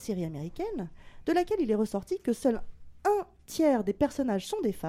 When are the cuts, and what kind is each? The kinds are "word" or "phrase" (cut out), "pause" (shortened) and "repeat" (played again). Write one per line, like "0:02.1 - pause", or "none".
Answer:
none